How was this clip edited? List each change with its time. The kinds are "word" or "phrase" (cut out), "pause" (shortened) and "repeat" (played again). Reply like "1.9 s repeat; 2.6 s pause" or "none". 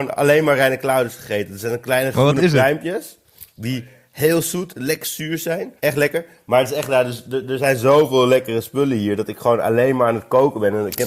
3.5 s pause; 5.8 s pause